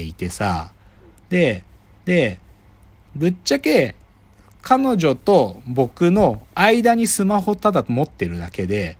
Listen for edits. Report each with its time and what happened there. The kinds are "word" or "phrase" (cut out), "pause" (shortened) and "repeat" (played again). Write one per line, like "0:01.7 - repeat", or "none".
0:02.0 - repeat